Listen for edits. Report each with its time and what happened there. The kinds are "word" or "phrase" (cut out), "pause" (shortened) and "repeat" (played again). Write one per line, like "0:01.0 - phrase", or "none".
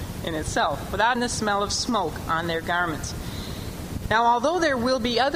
0:01.2 - word